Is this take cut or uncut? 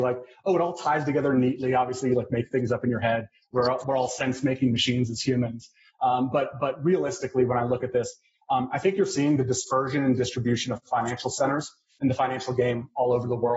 uncut